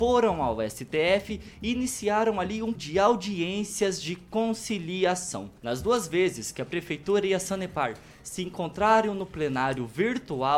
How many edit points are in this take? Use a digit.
2